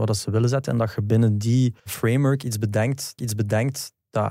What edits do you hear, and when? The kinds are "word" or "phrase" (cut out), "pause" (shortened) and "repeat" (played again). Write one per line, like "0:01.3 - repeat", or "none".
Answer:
0:01.8 - pause
0:03.2 - repeat